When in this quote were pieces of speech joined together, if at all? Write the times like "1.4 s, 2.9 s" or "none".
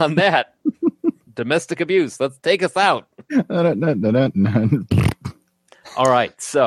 none